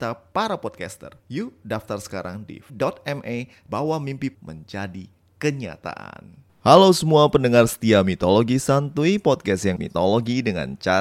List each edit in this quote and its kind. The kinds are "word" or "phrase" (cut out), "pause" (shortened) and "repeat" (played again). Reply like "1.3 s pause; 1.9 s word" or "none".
1.2 s pause; 2.7 s word; 3.7 s word; 4.3 s word; 6.5 s pause; 9.8 s word

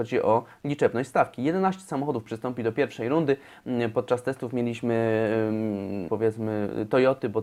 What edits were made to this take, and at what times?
6.1 s word

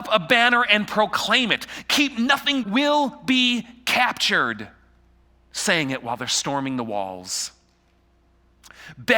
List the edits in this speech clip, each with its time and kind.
2.6 s phrase; 5.2 s pause

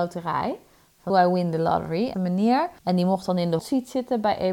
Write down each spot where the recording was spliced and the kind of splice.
1.1 s word; 2.1 s phrase; 2.8 s pause; 3.6 s word

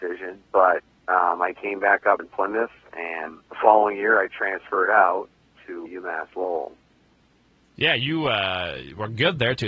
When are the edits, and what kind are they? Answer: 2.2 s phrase; 3.4 s pause; 5.9 s word

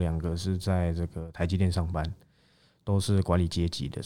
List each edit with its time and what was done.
none

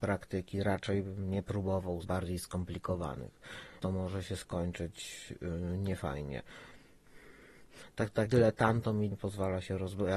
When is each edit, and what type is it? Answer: 2.0 s phrase; 3.8 s word; 8.3 s word; 9.1 s word

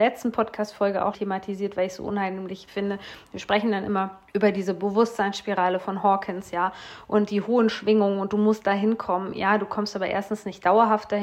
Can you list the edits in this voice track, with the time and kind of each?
1.1 s word; 2.7 s word; 4.3 s pause

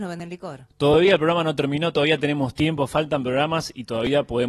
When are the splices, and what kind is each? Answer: none

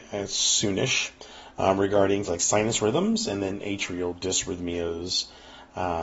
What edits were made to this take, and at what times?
2.3 s word

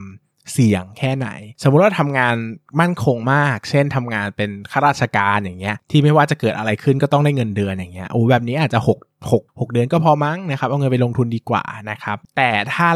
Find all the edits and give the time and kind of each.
9.5 s pause

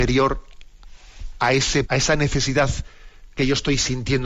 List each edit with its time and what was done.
1.8 s word; 3.4 s phrase

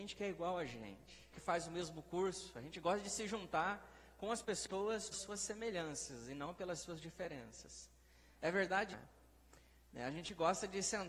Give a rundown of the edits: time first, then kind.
1.3 s phrase; 5.1 s word; 8.9 s phrase

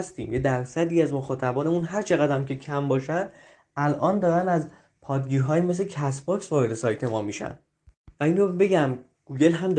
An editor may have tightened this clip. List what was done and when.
none

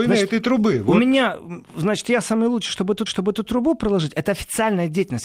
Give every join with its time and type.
3.1 s repeat

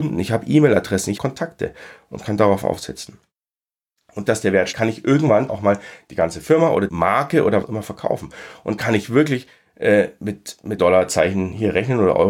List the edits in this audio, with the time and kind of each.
1.2 s word; 4.3 s word; 4.7 s word; 5.5 s word; 6.9 s word; 7.6 s word; 8.8 s word; 10.8 s word

